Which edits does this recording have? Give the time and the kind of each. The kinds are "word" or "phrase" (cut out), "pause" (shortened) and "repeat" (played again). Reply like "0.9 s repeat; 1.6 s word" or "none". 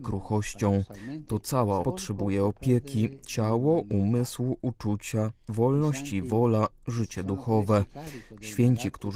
1.8 s word

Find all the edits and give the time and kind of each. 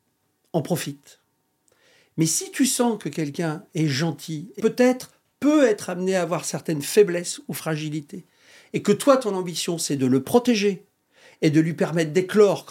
4.6 s word

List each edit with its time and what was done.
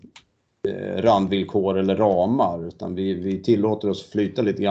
none

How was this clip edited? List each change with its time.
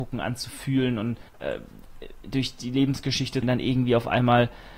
1.3 s pause; 3.4 s phrase

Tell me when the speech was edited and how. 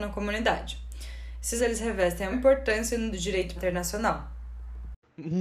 1.6 s word; 2.3 s word; 3.1 s word; 3.6 s word

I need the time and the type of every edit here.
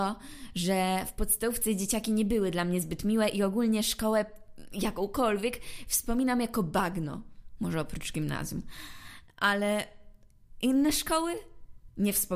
none

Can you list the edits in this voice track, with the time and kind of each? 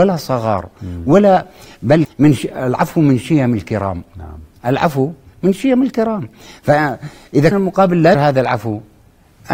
2.0 s word; 7.5 s word; 8.1 s word

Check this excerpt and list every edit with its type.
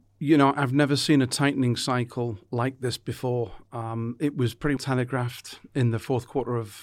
4.8 s word

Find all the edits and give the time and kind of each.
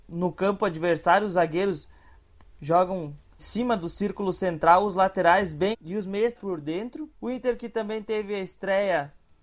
3.4 s word; 5.7 s word; 6.4 s phrase; 7.1 s pause

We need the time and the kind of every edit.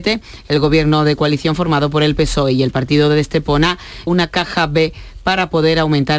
4.1 s word

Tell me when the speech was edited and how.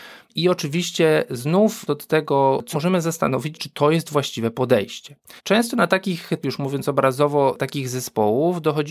1.9 s word; 2.7 s phrase; 3.5 s word; 5.4 s pause; 6.4 s word

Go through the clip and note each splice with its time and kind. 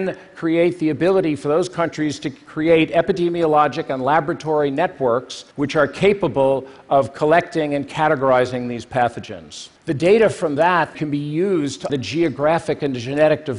5.5 s pause; 9.8 s pause; 10.9 s word; 11.9 s word

